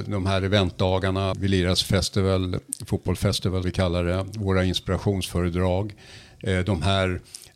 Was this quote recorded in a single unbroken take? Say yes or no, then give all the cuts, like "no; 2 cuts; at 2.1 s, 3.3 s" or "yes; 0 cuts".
no; 2 cuts; at 1.3 s, 3.6 s